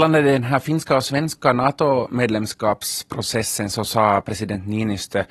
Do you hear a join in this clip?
no; 0 cuts

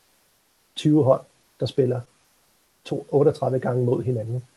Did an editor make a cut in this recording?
yes; 1 cut; at 2.8 s

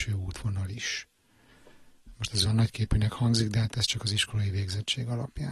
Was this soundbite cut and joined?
no; 0 cuts

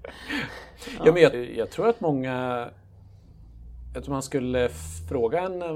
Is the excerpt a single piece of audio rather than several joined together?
no; 2 cuts; at 1.3 s, 4.0 s

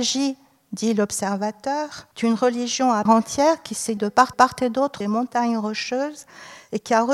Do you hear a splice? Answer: yes; 5 cuts; at 2.1 s, 3.1 s, 4.0 s, 4.3 s, 5.0 s

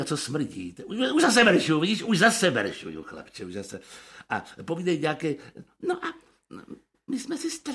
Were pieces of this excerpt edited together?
no; 0 cuts

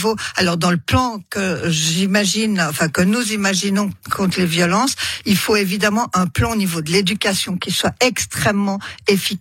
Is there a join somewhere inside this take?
no; 0 cuts

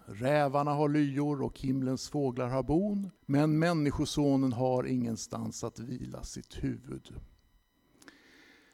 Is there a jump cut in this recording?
yes; 1 cut; at 3.2 s

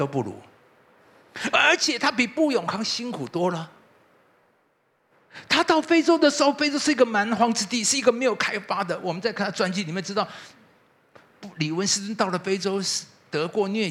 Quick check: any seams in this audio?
no; 0 cuts

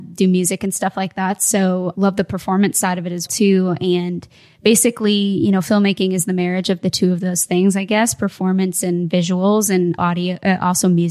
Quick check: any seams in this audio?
yes; 3 cuts; at 1.9 s, 3.3 s, 10.0 s

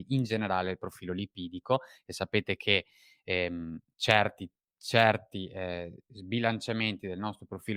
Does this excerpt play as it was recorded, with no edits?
yes; 0 cuts

